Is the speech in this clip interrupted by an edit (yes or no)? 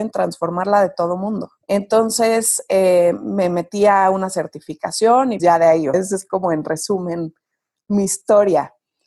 yes